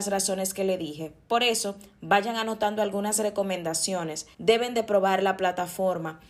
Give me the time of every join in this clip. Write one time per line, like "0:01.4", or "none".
0:04.3